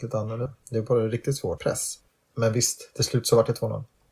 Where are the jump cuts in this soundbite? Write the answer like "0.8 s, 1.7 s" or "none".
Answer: 1.6 s, 2.2 s